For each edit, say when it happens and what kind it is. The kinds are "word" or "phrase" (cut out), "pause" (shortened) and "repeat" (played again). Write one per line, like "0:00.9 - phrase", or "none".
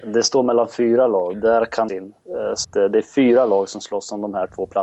0:01.3 - word
0:01.9 - phrase
0:02.6 - word